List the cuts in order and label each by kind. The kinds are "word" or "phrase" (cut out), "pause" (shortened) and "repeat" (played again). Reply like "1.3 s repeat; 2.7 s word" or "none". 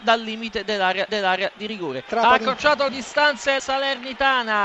1.1 s repeat; 2.9 s word; 3.6 s word